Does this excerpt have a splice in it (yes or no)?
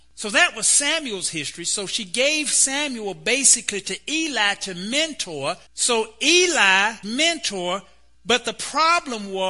yes